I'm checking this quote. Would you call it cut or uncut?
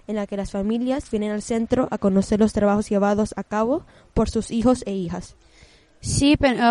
uncut